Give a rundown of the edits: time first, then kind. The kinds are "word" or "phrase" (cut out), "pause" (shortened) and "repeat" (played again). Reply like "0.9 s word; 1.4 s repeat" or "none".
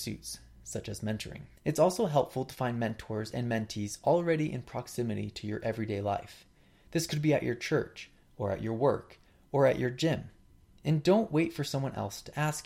1.6 s pause